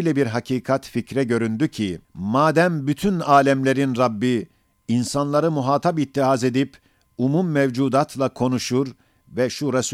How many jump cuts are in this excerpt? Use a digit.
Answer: 1